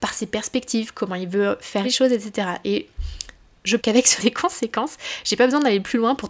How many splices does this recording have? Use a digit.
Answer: 3